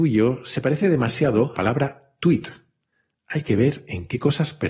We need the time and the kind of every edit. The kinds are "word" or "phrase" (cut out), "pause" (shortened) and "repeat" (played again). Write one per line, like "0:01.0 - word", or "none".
0:01.5 - phrase